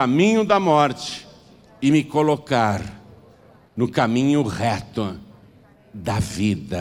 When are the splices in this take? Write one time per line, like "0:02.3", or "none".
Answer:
none

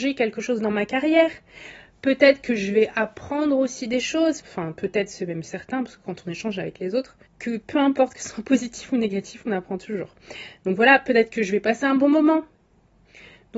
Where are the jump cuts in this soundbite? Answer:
0:04.4
0:07.3

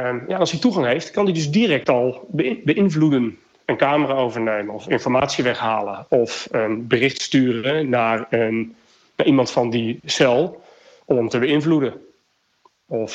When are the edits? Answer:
none

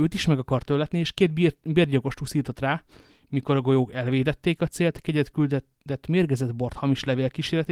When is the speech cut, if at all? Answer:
none

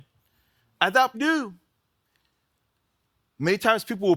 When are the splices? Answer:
0:01.1

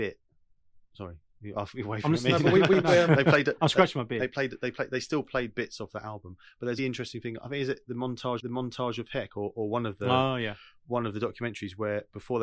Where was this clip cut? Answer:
0:06.8
0:08.4

